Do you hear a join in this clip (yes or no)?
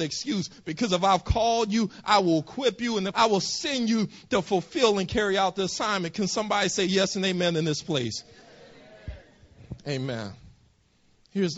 yes